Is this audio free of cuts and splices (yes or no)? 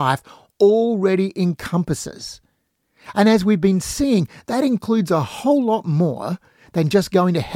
yes